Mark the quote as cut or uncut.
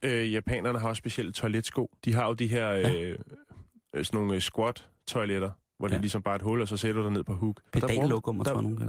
cut